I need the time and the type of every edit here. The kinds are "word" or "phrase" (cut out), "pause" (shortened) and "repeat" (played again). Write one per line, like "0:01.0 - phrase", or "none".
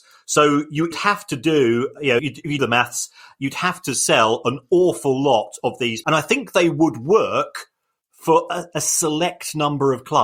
0:00.9 - word
0:02.2 - word
0:02.6 - word
0:06.0 - word